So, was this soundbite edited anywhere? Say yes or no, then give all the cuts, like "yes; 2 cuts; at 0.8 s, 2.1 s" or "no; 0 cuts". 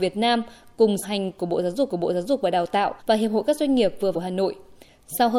yes; 4 cuts; at 1.0 s, 1.9 s, 3.0 s, 4.1 s